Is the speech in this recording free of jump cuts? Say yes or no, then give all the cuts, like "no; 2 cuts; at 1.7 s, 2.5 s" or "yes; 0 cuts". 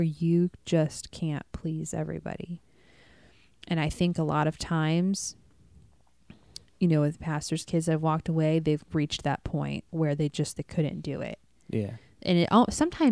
yes; 0 cuts